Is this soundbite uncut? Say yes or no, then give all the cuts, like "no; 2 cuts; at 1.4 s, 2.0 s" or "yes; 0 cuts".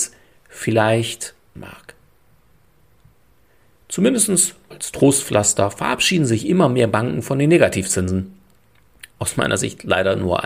no; 3 cuts; at 1.6 s, 4.7 s, 9.1 s